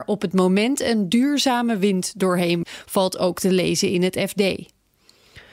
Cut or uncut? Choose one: cut